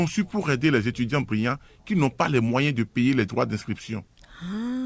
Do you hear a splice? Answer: no; 0 cuts

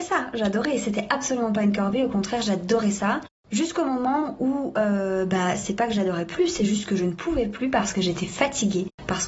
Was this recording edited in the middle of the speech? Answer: no; 0 cuts

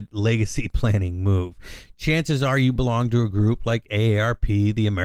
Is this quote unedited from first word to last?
yes; 0 cuts

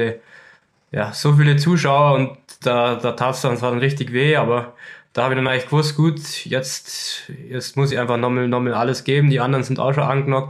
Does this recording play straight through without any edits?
yes; 0 cuts

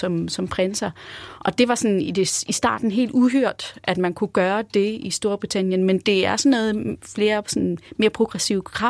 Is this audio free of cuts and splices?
yes; 0 cuts

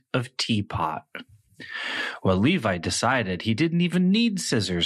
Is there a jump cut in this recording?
no; 0 cuts

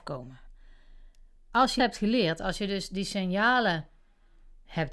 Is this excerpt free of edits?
no; 1 cut; at 1.8 s

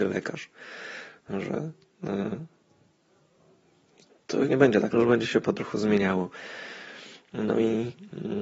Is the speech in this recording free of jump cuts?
no; 2 cuts; at 4.5 s, 4.9 s

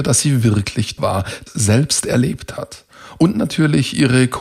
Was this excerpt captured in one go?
no; 2 cuts; at 1.0 s, 1.5 s

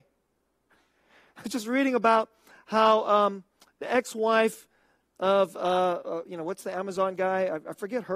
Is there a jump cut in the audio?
no; 0 cuts

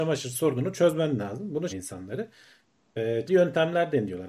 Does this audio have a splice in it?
yes; 2 cuts; at 1.7 s, 3.3 s

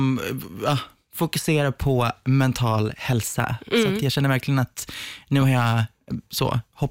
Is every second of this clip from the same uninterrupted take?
yes; 0 cuts

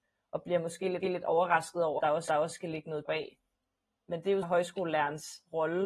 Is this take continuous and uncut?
no; 5 cuts; at 1.0 s, 2.0 s, 2.3 s, 3.1 s, 4.4 s

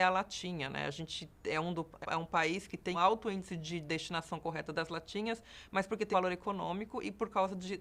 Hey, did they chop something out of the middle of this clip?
yes; 3 cuts; at 2.0 s, 2.9 s, 6.1 s

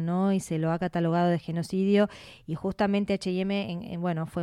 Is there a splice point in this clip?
no; 0 cuts

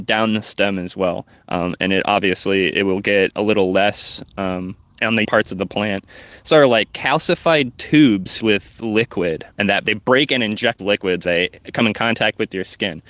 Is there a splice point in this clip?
yes; 8 cuts; at 4.8 s, 5.2 s, 6.5 s, 8.4 s, 9.5 s, 9.8 s, 10.8 s, 11.2 s

